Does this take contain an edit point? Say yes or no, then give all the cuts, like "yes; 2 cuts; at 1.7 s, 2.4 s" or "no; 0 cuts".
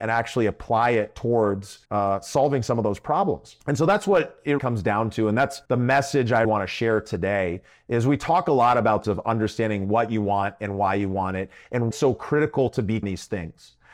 yes; 8 cuts; at 1.8 s, 3.6 s, 4.6 s, 5.7 s, 6.4 s, 9.0 s, 11.9 s, 13.0 s